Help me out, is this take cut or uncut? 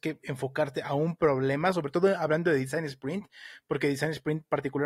uncut